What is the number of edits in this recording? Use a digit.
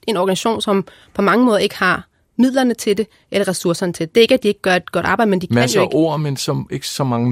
0